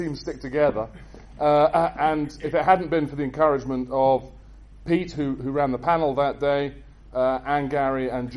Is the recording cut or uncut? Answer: uncut